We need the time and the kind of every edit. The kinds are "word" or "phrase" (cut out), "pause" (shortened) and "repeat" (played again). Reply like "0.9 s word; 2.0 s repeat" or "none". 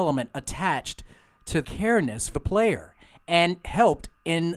1.6 s word; 2.3 s word; 3.6 s word